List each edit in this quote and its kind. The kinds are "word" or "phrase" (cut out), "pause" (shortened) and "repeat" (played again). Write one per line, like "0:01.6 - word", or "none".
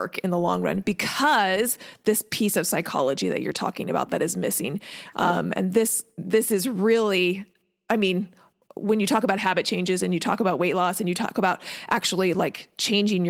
none